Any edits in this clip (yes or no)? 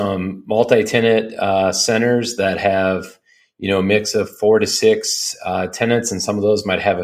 no